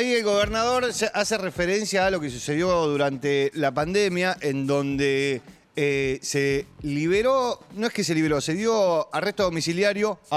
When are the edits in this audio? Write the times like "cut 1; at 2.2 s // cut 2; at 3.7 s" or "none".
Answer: none